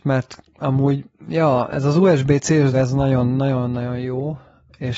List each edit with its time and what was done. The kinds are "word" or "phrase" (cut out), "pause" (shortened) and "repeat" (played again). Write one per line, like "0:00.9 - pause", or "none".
0:02.7 - word